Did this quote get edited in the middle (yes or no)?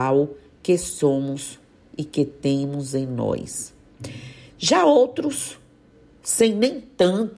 no